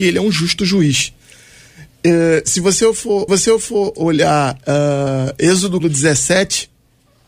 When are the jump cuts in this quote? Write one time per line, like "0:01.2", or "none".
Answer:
0:03.3
0:05.8